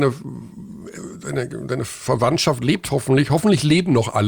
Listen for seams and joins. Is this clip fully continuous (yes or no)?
yes